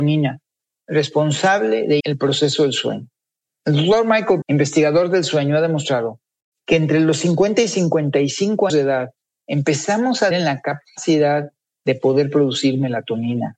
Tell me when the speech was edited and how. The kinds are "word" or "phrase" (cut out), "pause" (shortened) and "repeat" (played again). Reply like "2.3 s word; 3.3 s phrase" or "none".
2.0 s word; 4.4 s word; 8.7 s word; 10.3 s word